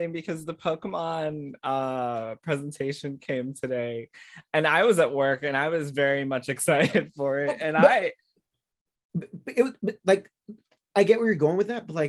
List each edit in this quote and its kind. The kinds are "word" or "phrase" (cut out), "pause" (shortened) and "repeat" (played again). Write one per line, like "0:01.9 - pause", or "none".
none